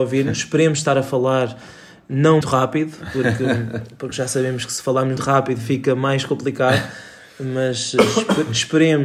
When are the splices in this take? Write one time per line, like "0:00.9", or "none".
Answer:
0:02.4
0:05.2